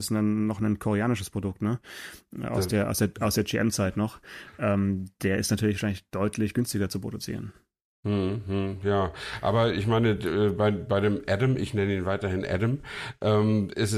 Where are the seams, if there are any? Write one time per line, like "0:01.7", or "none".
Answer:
none

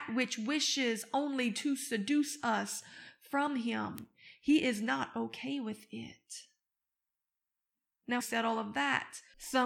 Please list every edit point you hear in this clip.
0:08.2

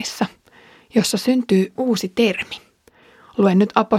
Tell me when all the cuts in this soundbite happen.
0:01.8

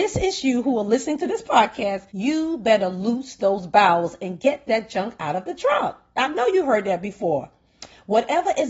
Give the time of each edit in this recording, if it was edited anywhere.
0:02.1

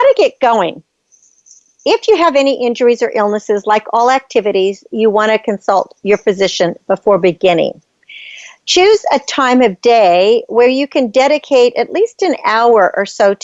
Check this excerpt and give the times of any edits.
none

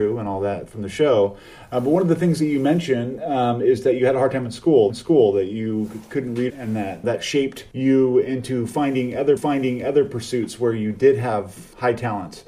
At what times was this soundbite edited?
0:04.9
0:06.5
0:07.0
0:09.4

